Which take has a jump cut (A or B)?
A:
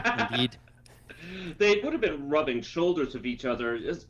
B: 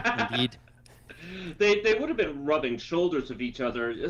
A